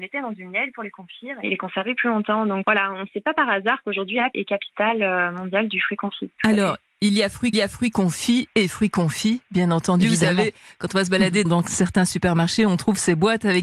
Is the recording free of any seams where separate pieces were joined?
no; 4 cuts; at 2.6 s, 4.3 s, 7.5 s, 11.5 s

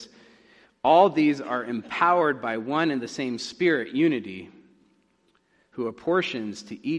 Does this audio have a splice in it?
no; 0 cuts

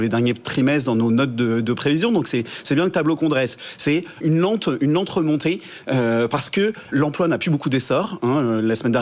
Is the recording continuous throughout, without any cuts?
no; 2 cuts; at 4.2 s, 6.9 s

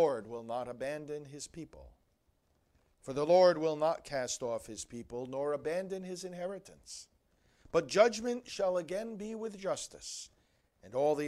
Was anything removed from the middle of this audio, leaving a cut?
no; 0 cuts

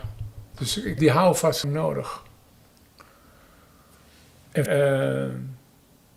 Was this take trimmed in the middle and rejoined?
yes; 3 cuts; at 1.0 s, 1.6 s, 4.7 s

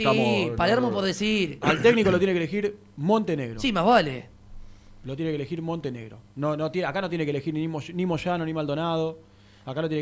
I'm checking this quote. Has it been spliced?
no; 0 cuts

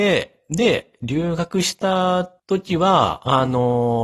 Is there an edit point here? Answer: yes; 1 cut; at 2.4 s

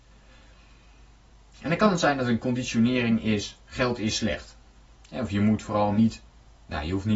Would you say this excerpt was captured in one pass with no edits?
yes; 0 cuts

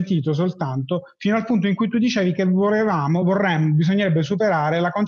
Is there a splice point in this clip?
no; 0 cuts

